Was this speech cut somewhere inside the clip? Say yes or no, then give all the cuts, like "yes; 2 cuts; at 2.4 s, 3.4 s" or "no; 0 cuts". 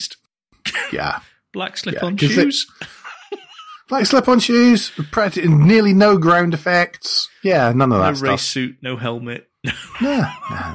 no; 0 cuts